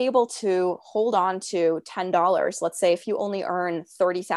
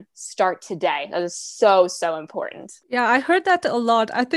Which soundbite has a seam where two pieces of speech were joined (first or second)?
second